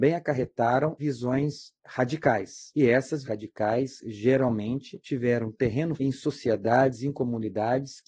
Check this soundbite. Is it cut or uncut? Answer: cut